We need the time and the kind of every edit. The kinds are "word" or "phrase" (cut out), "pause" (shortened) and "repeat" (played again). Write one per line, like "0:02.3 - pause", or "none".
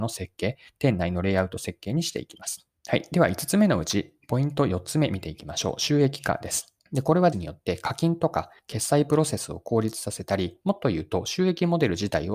0:02.8 - pause
0:06.8 - pause
0:07.3 - word